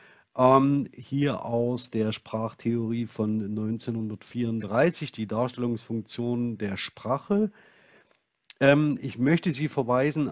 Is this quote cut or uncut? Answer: uncut